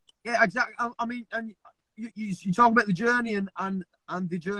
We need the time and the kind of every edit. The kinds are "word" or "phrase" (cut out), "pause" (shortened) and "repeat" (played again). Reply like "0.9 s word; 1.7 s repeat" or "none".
none